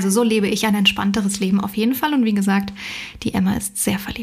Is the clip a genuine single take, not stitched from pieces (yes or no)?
yes